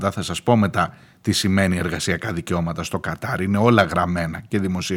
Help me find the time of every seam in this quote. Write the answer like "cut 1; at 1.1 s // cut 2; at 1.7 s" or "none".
none

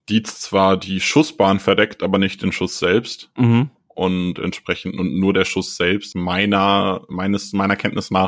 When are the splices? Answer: cut 1; at 6.1 s

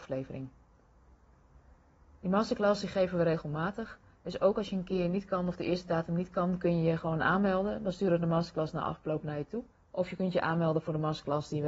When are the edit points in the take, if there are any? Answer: cut 1; at 9.7 s

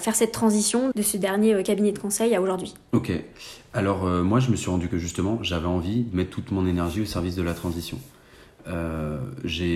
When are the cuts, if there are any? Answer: cut 1; at 0.9 s // cut 2; at 4.9 s

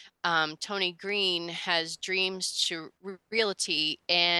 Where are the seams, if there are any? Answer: cut 1; at 2.9 s

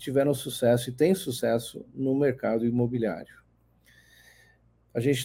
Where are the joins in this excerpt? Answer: none

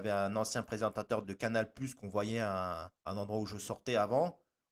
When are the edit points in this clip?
cut 1; at 1.2 s // cut 2; at 3.0 s

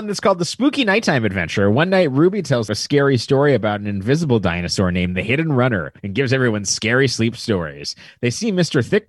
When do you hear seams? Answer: cut 1; at 2.7 s // cut 2; at 6.0 s

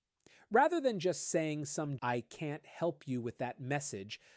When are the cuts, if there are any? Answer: cut 1; at 2.0 s

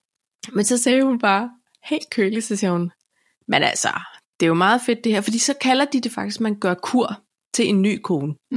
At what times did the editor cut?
none

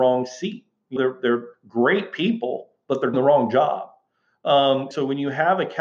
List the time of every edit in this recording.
cut 1; at 1.0 s // cut 2; at 1.5 s // cut 3; at 3.1 s // cut 4; at 4.9 s

